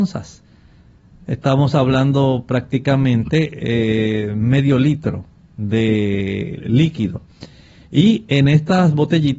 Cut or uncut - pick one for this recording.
uncut